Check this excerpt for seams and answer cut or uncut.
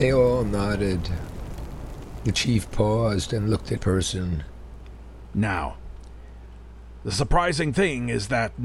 cut